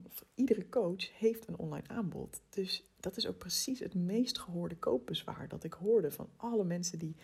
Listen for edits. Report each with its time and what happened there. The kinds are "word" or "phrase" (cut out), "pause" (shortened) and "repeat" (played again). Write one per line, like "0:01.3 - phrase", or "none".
none